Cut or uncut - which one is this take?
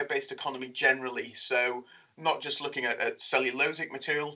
uncut